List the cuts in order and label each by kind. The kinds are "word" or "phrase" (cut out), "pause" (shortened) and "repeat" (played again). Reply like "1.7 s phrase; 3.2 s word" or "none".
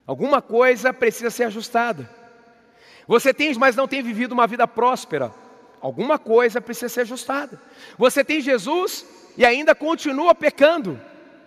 3.5 s word